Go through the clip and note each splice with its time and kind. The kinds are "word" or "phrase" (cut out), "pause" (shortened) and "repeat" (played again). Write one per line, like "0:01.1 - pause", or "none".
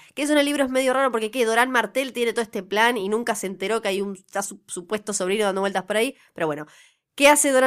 none